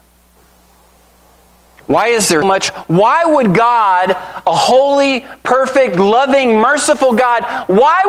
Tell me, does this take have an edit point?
yes; 1 cut; at 2.4 s

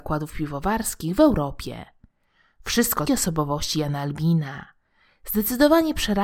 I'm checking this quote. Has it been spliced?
yes; 1 cut; at 3.1 s

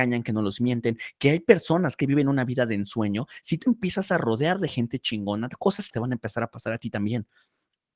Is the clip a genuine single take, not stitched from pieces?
no; 3 cuts; at 2.0 s, 3.6 s, 5.9 s

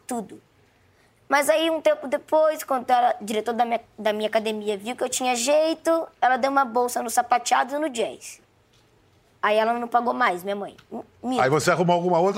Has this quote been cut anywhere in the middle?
no; 0 cuts

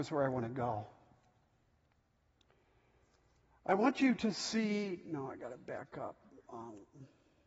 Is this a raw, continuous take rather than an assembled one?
yes; 0 cuts

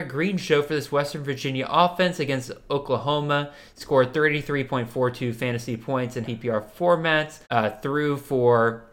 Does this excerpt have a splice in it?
yes; 2 cuts; at 6.2 s, 7.4 s

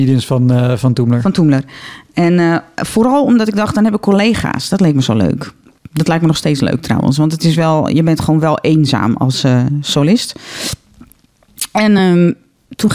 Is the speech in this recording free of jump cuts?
yes; 0 cuts

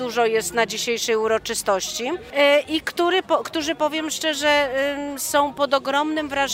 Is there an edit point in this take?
no; 0 cuts

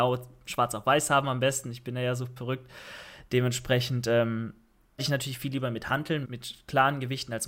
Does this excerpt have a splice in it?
yes; 3 cuts; at 2.4 s, 5.0 s, 6.2 s

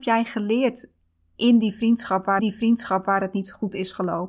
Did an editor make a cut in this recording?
yes; 1 cut; at 2.4 s

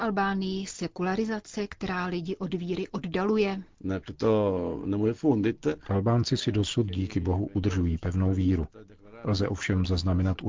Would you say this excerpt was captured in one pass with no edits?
yes; 0 cuts

